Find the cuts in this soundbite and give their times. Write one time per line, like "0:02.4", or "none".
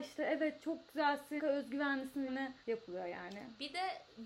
0:01.4
0:02.3
0:02.6